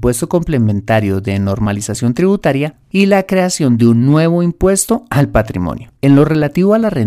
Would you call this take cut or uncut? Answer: cut